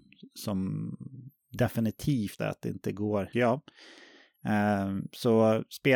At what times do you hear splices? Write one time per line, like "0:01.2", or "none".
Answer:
0:02.4
0:03.3